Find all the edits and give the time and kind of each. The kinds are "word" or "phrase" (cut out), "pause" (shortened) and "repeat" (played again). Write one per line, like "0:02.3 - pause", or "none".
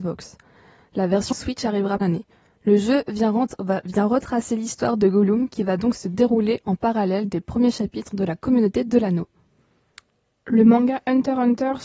0:01.3 - word
0:02.0 - phrase